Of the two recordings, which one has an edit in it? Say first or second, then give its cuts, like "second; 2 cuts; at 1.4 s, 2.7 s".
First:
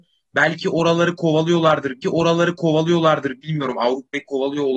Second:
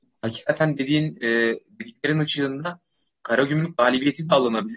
first; 1 cut; at 2.0 s